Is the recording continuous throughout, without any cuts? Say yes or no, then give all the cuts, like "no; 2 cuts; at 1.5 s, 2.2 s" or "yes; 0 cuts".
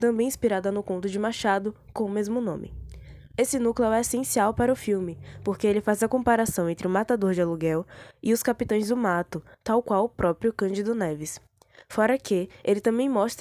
yes; 0 cuts